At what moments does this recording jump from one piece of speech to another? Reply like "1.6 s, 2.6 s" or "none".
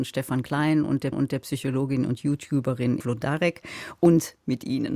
1.1 s, 3.0 s